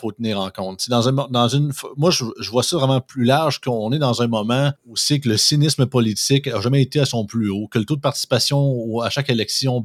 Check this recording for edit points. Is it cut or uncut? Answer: cut